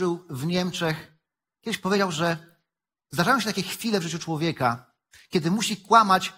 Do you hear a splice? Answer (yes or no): no